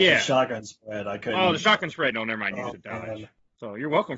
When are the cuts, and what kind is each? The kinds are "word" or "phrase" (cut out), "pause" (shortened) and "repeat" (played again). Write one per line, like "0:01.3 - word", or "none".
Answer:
0:02.1 - word
0:02.7 - word